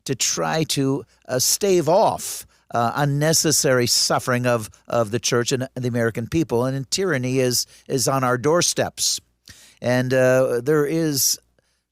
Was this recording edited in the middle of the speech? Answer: no; 0 cuts

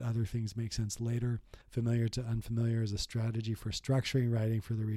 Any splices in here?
yes; 1 cut; at 1.6 s

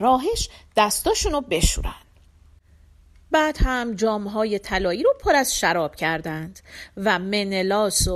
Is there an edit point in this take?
no; 0 cuts

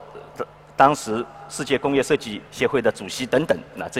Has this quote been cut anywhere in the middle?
yes; 1 cut; at 2.5 s

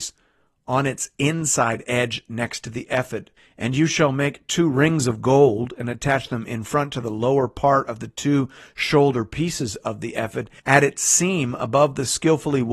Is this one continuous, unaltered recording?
no; 2 cuts; at 3.4 s, 10.6 s

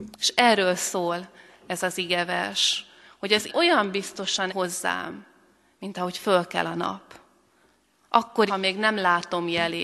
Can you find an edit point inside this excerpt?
yes; 3 cuts; at 3.5 s, 4.5 s, 8.5 s

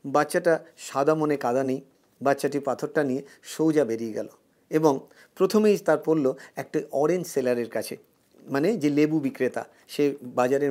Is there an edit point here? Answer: no; 0 cuts

